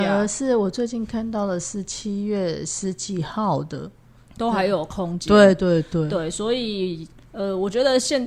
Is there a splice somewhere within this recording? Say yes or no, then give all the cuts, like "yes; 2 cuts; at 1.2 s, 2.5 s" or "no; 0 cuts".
no; 0 cuts